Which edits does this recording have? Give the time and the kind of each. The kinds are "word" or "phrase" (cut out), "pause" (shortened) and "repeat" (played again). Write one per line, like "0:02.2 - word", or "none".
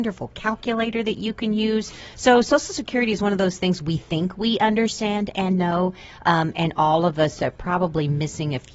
none